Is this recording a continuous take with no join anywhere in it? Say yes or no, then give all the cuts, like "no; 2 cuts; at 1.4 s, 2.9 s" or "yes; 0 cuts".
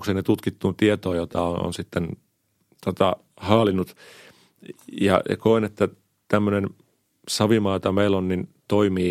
yes; 0 cuts